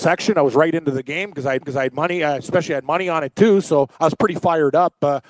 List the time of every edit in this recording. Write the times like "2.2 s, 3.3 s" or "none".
1.6 s, 4.0 s

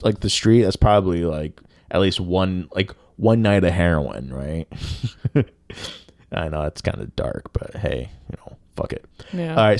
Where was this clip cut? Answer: none

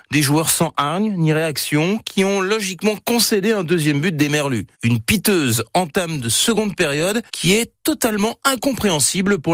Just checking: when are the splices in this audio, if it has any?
4.7 s, 7.3 s

